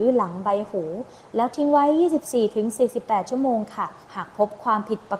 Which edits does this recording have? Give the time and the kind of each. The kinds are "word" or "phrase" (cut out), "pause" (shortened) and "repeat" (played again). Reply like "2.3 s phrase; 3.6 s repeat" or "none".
4.0 s pause